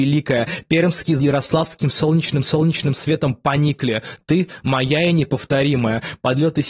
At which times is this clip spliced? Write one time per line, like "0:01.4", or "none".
0:01.2
0:02.4